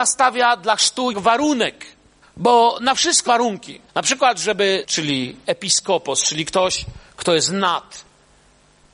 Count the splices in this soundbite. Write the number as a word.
five